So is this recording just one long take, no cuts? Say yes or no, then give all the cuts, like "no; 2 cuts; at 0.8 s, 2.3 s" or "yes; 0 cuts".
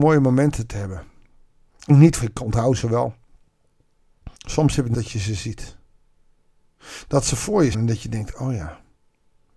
no; 5 cuts; at 1.9 s, 2.2 s, 4.4 s, 4.9 s, 7.7 s